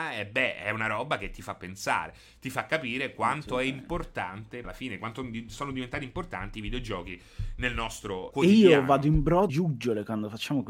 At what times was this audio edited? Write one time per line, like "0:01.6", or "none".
0:04.6
0:08.3
0:09.5